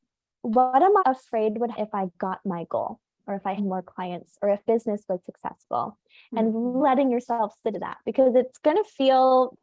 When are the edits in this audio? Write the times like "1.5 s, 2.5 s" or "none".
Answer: 1.0 s, 1.7 s, 3.6 s, 4.6 s, 6.8 s, 7.7 s